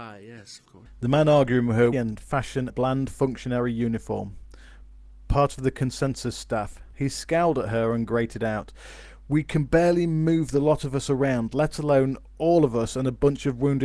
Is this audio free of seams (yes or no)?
no